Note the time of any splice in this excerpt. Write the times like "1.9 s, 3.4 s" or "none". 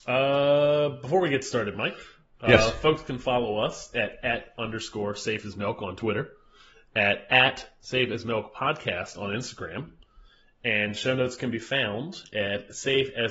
none